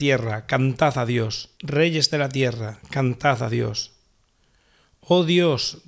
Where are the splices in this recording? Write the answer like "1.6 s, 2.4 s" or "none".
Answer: 1.6 s